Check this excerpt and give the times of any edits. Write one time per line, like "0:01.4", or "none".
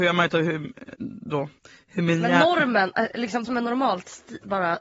0:03.4